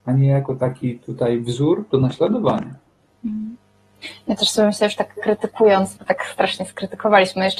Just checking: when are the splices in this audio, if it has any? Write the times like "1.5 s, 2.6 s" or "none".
none